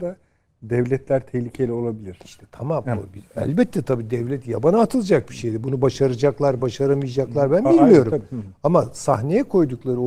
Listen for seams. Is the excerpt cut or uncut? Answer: uncut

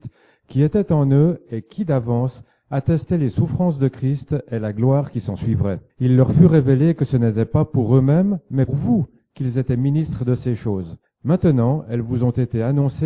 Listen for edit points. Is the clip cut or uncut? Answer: cut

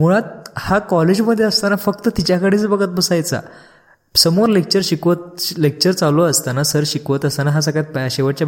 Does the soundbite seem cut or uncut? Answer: uncut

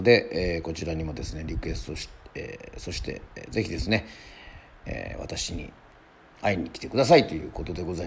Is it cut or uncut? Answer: uncut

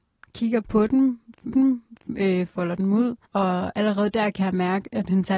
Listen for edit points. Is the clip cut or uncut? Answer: cut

